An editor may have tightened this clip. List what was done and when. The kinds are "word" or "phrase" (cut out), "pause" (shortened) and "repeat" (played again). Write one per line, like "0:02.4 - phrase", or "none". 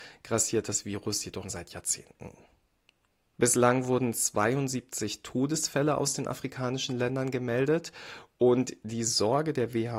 0:01.4 - word